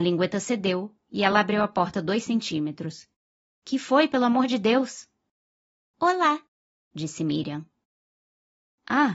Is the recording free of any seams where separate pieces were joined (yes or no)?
yes